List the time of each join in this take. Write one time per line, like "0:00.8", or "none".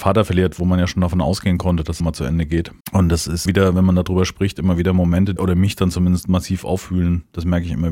0:02.0
0:02.8
0:03.5
0:05.4